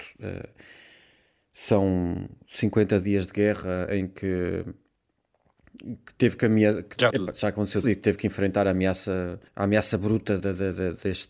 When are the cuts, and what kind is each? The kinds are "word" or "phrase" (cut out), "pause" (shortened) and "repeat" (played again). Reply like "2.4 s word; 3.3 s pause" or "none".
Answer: 7.1 s word; 7.8 s word; 9.5 s pause; 10.4 s word